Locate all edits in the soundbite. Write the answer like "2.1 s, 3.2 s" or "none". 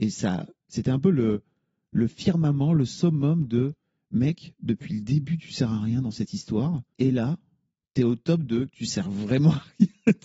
none

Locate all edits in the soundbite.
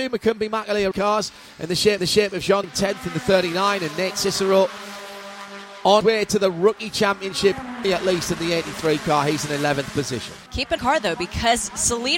0.9 s, 2.0 s, 2.6 s, 6.0 s, 7.8 s, 10.5 s, 10.8 s

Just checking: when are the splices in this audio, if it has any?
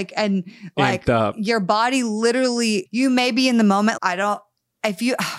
2.9 s, 4.0 s

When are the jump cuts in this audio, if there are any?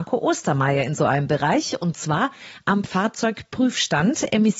none

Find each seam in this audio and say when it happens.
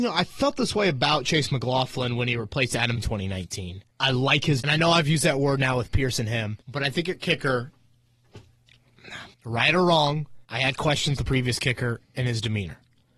3.0 s, 3.9 s, 4.6 s, 6.6 s, 9.3 s, 10.4 s, 11.2 s

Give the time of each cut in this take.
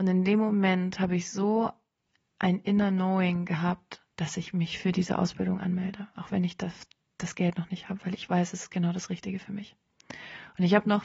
none

